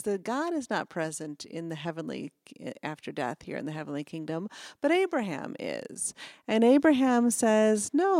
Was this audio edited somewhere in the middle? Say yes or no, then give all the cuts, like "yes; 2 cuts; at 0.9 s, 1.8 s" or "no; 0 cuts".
no; 0 cuts